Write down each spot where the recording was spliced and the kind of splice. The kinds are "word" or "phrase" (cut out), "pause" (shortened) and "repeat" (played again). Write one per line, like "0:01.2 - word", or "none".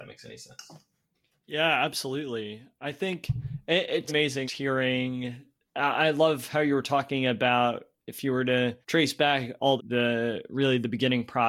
0:04.1 - word
0:04.4 - word
0:05.6 - pause
0:08.8 - pause
0:09.8 - phrase

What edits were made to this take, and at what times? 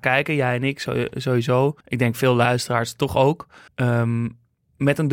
0:01.8 - pause
0:03.7 - pause

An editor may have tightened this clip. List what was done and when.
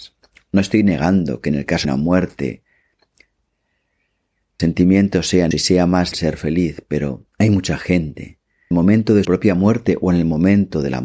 0:01.8 - word
0:04.6 - word
0:05.5 - word
0:06.1 - word
0:07.3 - pause
0:08.7 - phrase
0:09.2 - word

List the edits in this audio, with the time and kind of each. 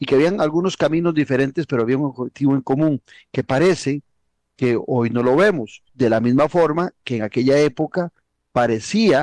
0:05.9 - pause

